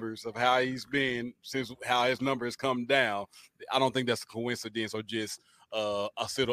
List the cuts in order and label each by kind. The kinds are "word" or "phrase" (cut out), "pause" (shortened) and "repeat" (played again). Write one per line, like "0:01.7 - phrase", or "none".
none